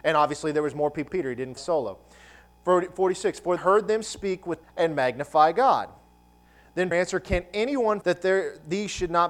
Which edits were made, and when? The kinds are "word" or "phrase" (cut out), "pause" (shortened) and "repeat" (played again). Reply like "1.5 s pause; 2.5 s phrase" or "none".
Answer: 1.1 s word; 1.6 s word; 3.6 s word; 4.6 s word; 6.9 s word; 8.0 s phrase

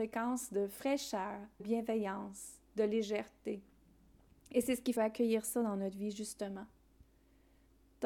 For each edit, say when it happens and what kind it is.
1.6 s word; 5.0 s phrase

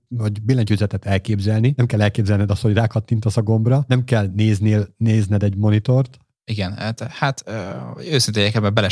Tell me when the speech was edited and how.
none

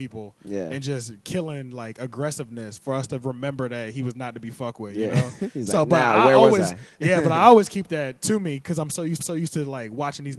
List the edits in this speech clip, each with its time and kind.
9.2 s repeat

